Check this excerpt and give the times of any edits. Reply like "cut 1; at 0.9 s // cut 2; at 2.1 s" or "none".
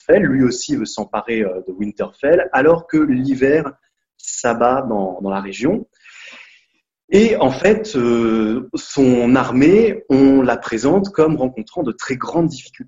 none